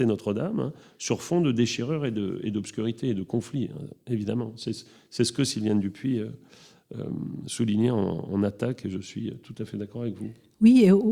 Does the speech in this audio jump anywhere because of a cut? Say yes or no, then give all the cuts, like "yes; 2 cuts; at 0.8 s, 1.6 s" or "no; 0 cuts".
no; 0 cuts